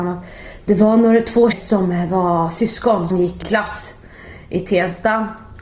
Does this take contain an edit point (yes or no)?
yes